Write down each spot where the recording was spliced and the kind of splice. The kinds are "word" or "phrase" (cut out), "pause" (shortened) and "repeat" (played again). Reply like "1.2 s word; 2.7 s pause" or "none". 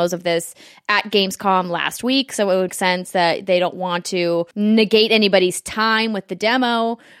2.7 s word; 4.5 s pause